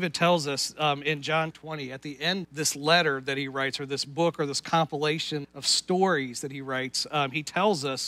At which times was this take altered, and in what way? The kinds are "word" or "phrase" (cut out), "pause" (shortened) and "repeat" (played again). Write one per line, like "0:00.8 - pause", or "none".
0:01.5 - word
0:02.4 - word
0:05.4 - word

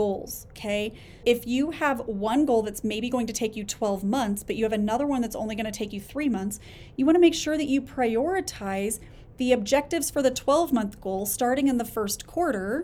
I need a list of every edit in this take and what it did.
0:01.2 - word

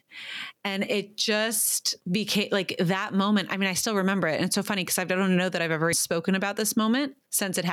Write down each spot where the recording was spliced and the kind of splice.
0:02.0 - pause
0:05.9 - word

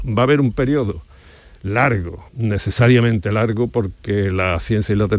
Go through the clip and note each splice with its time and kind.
0:02.3 - pause

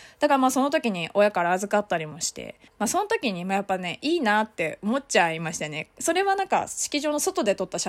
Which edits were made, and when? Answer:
0:02.7 - pause

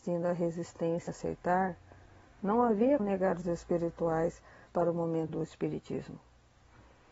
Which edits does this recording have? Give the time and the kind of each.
0:01.1 - word
0:03.0 - word
0:03.4 - word
0:04.7 - word
0:05.3 - word

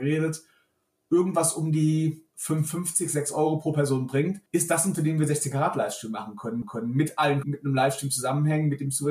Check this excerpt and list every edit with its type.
0:04.5 - pause
0:04.9 - word
0:06.6 - repeat
0:07.4 - phrase

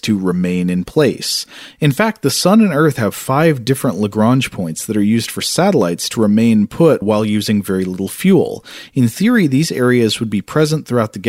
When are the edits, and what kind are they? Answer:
0:07.0 - word

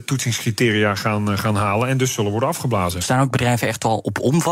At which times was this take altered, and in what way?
none

